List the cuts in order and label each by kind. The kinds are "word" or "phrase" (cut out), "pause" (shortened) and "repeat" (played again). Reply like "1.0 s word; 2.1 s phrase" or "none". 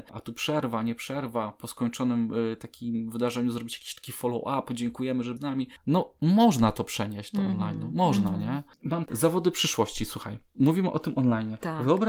5.4 s word; 9.1 s word